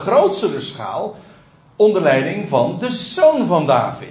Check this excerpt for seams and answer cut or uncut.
uncut